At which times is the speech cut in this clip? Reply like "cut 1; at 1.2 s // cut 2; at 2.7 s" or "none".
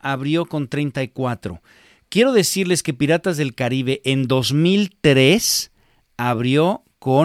none